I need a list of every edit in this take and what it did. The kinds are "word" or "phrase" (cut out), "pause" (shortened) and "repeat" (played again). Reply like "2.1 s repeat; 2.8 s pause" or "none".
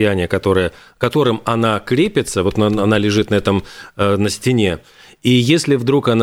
none